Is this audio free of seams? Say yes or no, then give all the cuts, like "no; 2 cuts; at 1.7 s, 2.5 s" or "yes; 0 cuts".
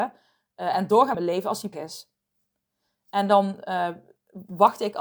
no; 2 cuts; at 1.1 s, 1.7 s